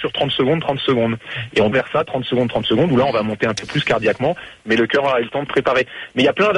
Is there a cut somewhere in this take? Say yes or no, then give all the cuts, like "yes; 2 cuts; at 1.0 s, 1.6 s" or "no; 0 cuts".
yes; 2 cuts; at 1.7 s, 5.5 s